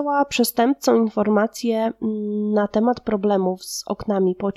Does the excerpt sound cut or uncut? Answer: uncut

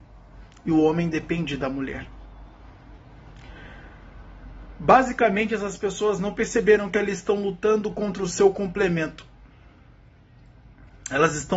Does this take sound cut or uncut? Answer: uncut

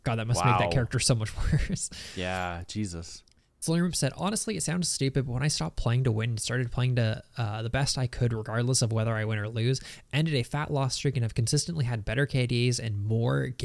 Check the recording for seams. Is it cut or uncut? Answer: uncut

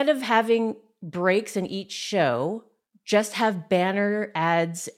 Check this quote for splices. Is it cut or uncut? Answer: uncut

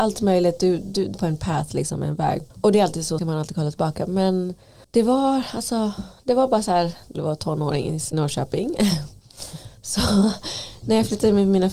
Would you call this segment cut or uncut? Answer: cut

